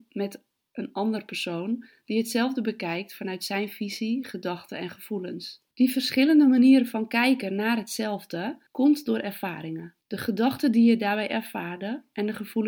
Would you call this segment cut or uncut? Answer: cut